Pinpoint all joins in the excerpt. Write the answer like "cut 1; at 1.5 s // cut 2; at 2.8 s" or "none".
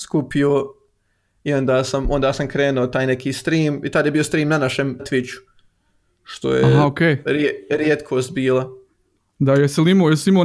cut 1; at 5.0 s